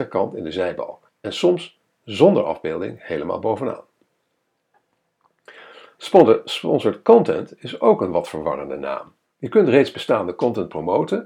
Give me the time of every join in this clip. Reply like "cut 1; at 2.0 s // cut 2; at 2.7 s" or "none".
cut 1; at 1.1 s // cut 2; at 9.3 s

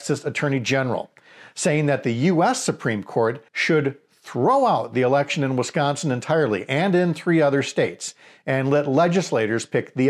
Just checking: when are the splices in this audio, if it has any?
cut 1; at 3.5 s

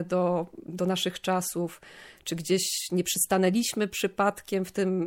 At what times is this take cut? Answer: none

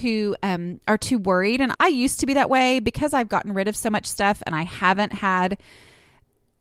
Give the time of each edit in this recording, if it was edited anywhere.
cut 1; at 1.7 s

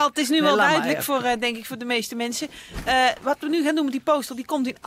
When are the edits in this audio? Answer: none

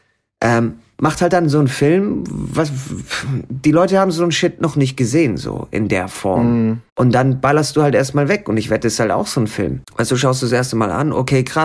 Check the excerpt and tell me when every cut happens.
cut 1; at 6.9 s // cut 2; at 9.8 s

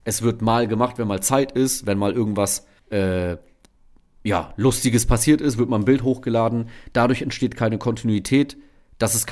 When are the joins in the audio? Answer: cut 1; at 2.8 s

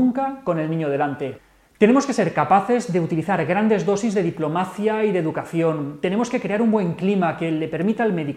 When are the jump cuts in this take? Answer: none

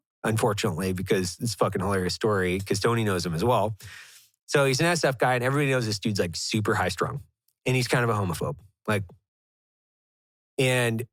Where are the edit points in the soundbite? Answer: none

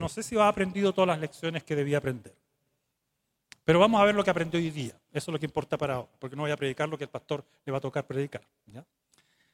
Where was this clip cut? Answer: none

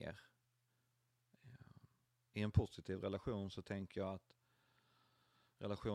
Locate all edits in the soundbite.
none

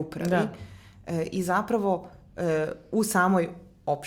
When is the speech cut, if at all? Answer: none

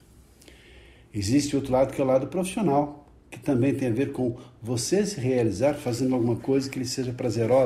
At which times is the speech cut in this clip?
none

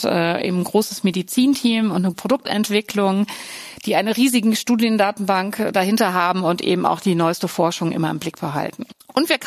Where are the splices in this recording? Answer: cut 1; at 2.1 s

